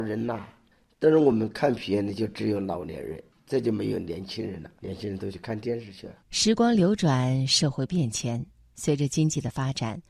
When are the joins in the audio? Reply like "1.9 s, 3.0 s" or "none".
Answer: 4.8 s, 6.2 s